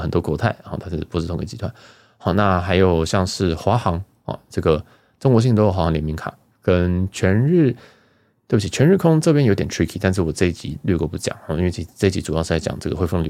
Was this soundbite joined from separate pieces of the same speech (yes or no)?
no